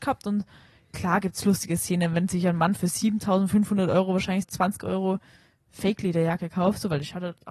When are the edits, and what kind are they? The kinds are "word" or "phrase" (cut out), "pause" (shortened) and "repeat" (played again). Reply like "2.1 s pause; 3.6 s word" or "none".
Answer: 4.4 s word